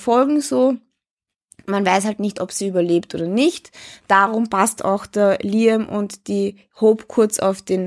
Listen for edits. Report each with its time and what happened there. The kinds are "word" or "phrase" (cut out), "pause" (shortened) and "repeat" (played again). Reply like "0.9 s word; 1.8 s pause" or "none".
none